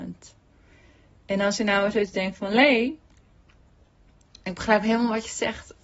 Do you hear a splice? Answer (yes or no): no